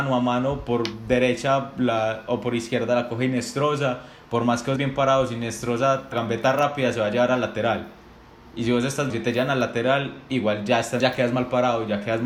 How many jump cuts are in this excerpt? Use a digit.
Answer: 4